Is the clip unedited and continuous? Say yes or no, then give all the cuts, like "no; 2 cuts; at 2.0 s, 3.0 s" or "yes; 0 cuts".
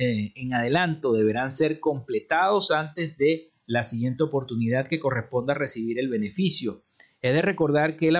yes; 0 cuts